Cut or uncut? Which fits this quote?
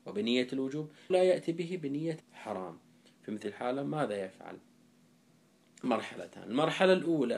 cut